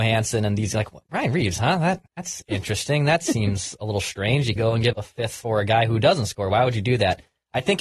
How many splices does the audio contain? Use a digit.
3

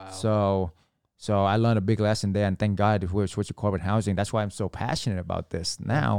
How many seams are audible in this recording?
0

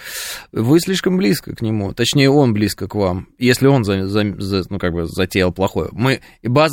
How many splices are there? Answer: 0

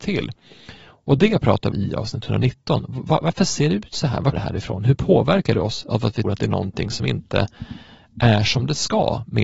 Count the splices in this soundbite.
4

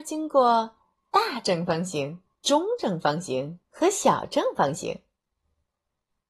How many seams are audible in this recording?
3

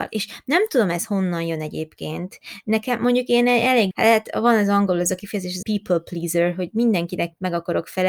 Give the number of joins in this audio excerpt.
2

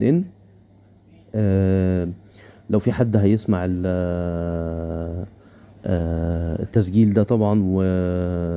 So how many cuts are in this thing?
0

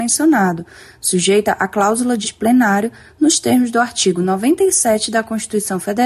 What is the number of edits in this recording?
1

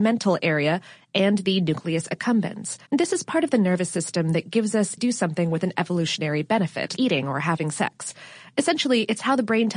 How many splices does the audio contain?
3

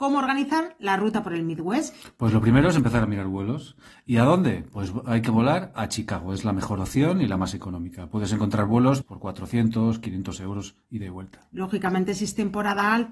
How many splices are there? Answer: 1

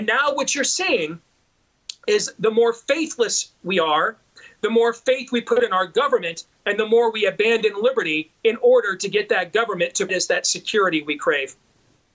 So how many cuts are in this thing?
1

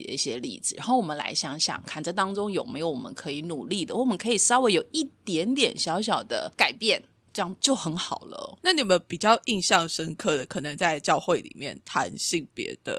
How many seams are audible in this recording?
1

